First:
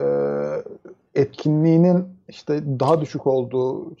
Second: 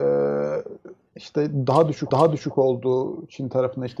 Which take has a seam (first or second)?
second